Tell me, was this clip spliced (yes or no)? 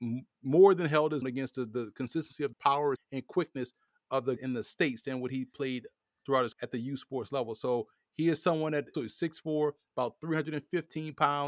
yes